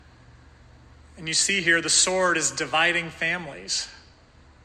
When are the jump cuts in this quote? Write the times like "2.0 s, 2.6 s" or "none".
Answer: none